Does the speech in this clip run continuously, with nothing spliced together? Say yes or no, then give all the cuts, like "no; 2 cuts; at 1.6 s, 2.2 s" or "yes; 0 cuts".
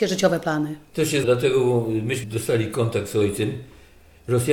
no; 2 cuts; at 1.2 s, 2.2 s